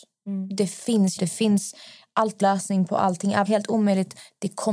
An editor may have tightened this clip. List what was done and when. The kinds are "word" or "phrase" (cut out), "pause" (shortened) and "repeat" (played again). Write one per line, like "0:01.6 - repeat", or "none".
0:01.2 - phrase
0:02.4 - word
0:03.4 - phrase